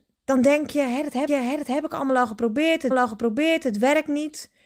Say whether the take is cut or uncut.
cut